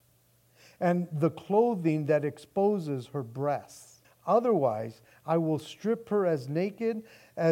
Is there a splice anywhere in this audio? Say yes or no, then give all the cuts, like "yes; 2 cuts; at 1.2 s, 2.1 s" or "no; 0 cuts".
yes; 1 cut; at 4.0 s